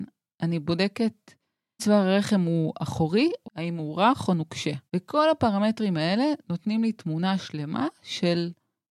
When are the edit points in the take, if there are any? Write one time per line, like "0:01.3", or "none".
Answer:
0:01.8
0:03.4
0:04.9